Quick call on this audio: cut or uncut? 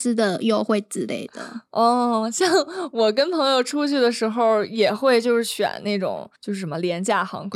cut